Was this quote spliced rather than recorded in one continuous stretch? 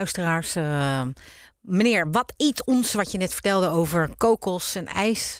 no; 0 cuts

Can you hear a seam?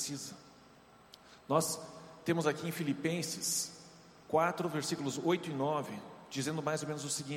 no; 0 cuts

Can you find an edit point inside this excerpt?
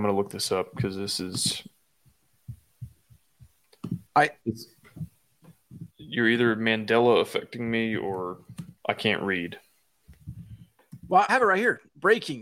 yes; 4 cuts; at 4.1 s, 5.9 s, 8.8 s, 11.3 s

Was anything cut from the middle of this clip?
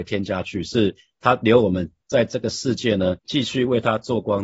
yes; 1 cut; at 3.2 s

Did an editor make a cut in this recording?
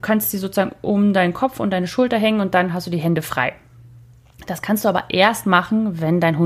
no; 0 cuts

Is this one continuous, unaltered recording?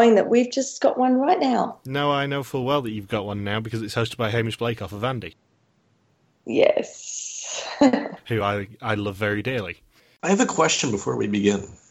yes; 0 cuts

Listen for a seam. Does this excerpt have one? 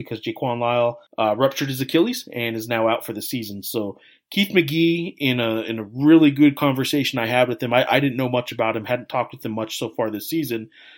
yes; 1 cut; at 1.1 s

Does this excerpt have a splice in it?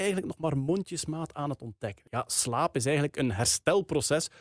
no; 0 cuts

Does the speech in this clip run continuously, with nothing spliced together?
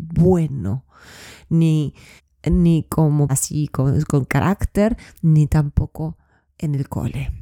no; 3 cuts; at 2.2 s, 3.3 s, 4.3 s

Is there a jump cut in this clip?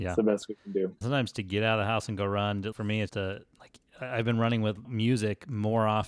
yes; 4 cuts; at 1.0 s, 2.7 s, 3.1 s, 4.8 s

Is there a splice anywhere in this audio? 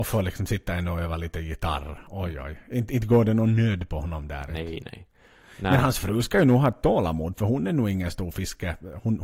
no; 0 cuts

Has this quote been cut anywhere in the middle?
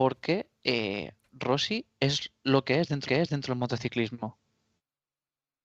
yes; 1 cut; at 3.1 s

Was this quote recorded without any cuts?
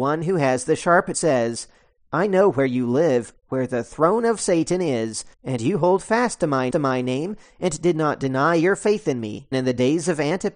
no; 4 cuts; at 1.1 s, 5.3 s, 6.7 s, 9.5 s

